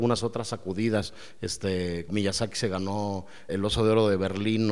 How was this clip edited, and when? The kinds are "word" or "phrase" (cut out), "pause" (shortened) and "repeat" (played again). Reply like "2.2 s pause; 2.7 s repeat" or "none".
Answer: 2.1 s word; 3.5 s word